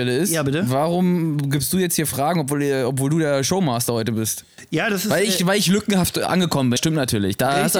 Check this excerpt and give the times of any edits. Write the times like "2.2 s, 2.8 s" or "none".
6.8 s